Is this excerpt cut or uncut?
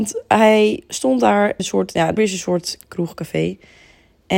cut